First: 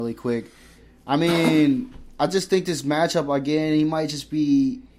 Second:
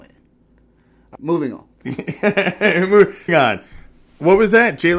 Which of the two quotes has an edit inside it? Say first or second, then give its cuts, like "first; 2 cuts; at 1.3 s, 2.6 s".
second; 2 cuts; at 1.1 s, 3.3 s